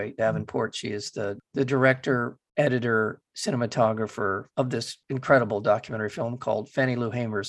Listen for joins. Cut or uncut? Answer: cut